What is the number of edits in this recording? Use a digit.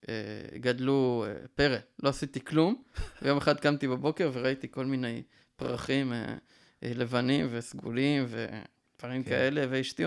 0